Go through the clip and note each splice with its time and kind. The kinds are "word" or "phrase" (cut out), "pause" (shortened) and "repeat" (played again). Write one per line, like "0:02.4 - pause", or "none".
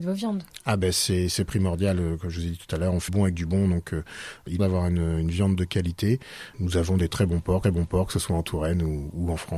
0:03.1 - word
0:04.6 - phrase
0:07.1 - word
0:07.6 - repeat